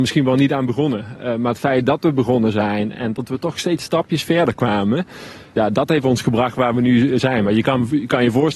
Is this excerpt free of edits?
yes; 0 cuts

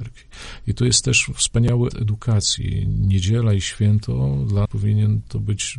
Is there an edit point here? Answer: yes; 2 cuts; at 1.9 s, 4.7 s

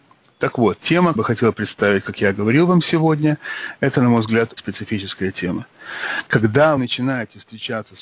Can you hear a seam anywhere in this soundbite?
yes; 3 cuts; at 1.2 s, 4.6 s, 6.8 s

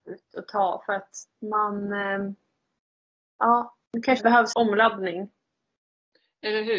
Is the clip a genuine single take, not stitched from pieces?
no; 3 cuts; at 3.8 s, 4.2 s, 4.5 s

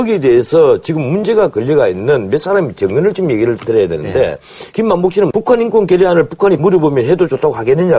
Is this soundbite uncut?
no; 1 cut; at 6.6 s

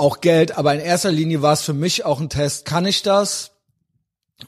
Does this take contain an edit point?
no; 0 cuts

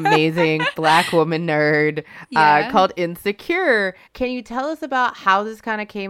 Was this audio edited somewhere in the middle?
yes; 1 cut; at 4.0 s

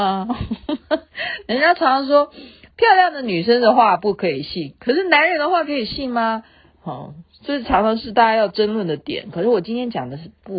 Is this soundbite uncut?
yes; 0 cuts

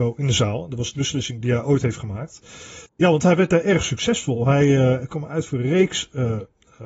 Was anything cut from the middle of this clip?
yes; 2 cuts; at 0.9 s, 2.9 s

